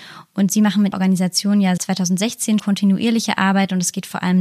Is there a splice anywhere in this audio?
yes; 3 cuts; at 0.9 s, 1.8 s, 2.6 s

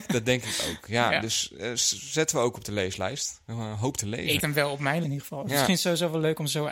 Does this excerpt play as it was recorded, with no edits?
no; 2 cuts; at 4.4 s, 5.0 s

